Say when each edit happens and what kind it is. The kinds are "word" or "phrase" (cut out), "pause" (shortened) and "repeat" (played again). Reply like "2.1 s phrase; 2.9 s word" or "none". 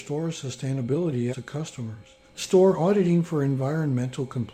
1.3 s word